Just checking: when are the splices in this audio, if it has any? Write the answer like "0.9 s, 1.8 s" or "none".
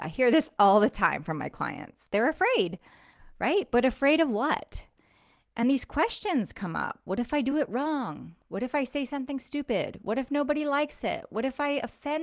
none